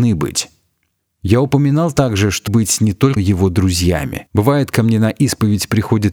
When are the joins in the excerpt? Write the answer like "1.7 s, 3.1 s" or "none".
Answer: 2.5 s, 3.2 s, 4.3 s